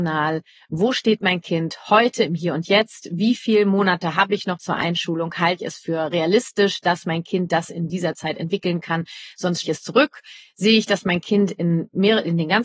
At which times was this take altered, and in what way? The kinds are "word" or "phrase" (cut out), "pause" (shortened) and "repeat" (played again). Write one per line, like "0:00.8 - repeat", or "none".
0:04.6 - word
0:05.6 - word
0:09.6 - word